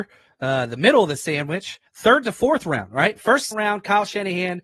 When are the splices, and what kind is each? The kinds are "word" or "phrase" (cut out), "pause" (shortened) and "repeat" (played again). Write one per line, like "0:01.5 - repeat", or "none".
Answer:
0:01.9 - pause
0:03.5 - word